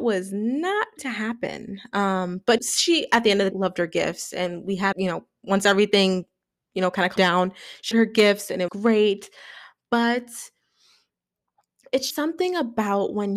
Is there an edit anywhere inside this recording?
yes; 8 cuts; at 1.0 s, 2.6 s, 3.5 s, 4.9 s, 7.2 s, 7.9 s, 8.7 s, 12.1 s

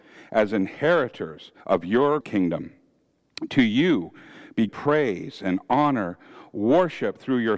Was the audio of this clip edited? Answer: yes; 3 cuts; at 1.6 s, 2.2 s, 4.7 s

